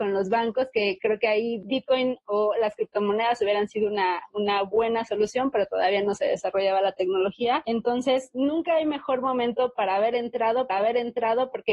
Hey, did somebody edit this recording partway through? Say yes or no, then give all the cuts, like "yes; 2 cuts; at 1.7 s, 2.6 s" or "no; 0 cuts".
yes; 1 cut; at 10.7 s